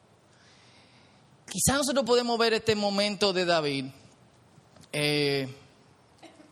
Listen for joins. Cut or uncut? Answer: uncut